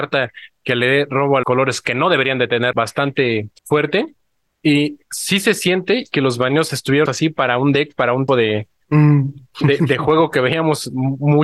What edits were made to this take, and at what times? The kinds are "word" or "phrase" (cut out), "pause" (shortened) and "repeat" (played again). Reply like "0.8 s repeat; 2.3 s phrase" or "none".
1.4 s word; 2.7 s phrase; 3.6 s pause; 7.1 s word; 8.3 s word